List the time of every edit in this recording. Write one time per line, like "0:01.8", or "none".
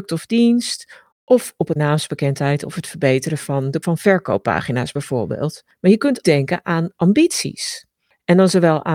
0:01.1
0:01.8
0:03.8
0:06.2